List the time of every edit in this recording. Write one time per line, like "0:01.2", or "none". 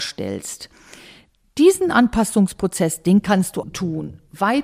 0:03.6